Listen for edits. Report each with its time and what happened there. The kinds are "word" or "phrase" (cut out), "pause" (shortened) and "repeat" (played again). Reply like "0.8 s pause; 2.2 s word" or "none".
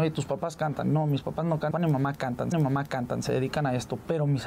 1.7 s phrase; 2.5 s repeat